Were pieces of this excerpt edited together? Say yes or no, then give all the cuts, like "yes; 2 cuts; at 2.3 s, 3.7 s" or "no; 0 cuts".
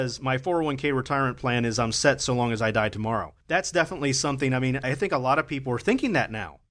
yes; 2 cuts; at 3.4 s, 4.8 s